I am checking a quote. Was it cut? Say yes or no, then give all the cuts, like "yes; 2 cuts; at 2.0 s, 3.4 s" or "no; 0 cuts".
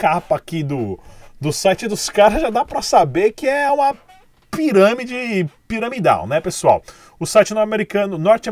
no; 0 cuts